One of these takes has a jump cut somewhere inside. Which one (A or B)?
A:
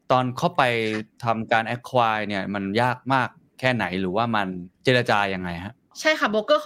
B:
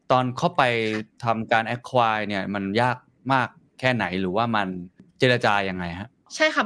A